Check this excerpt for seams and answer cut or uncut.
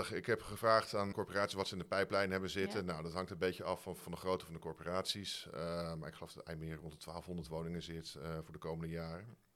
cut